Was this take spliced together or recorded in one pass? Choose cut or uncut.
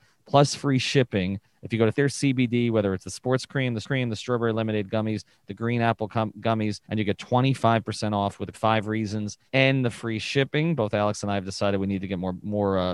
cut